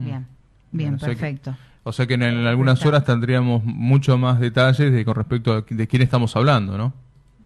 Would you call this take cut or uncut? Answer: uncut